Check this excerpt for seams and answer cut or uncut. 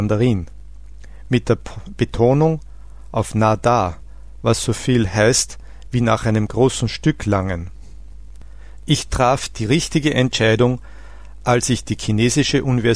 uncut